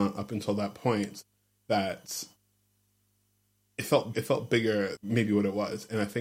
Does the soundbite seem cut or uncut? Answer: cut